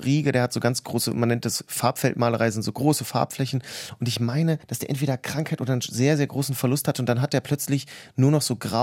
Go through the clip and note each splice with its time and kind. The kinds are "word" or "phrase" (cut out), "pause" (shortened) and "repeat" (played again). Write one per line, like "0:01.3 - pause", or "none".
0:04.6 - pause

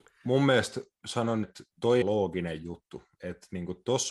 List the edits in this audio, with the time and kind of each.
0:01.4 - word
0:02.0 - phrase

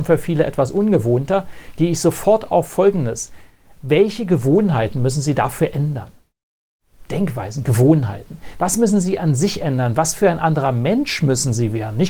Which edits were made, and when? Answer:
none

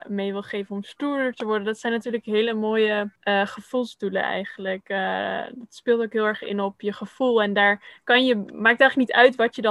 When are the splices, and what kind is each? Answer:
0:03.2 - pause

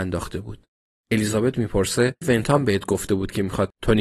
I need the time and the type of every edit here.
0:02.2 - word

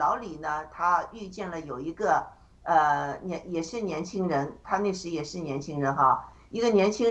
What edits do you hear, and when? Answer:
none

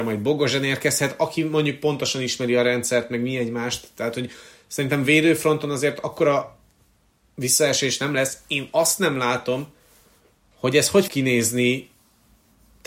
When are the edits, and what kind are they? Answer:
0:11.1 - word

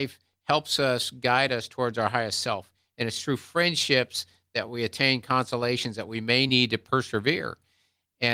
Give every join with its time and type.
none

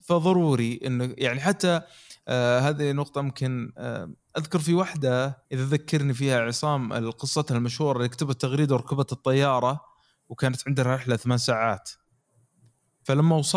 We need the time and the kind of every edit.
0:05.4 - pause

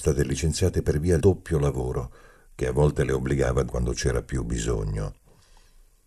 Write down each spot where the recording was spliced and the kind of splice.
0:01.2 - word
0:03.7 - word

